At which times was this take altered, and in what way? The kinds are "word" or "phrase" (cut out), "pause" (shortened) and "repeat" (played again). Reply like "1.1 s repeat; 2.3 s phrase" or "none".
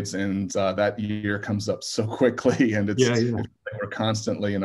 none